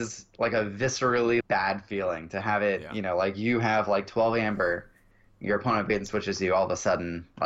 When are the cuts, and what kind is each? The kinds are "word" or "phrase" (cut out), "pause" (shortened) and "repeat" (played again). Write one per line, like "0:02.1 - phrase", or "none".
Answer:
0:01.4 - word